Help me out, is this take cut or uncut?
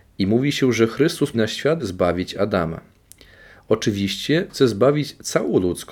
cut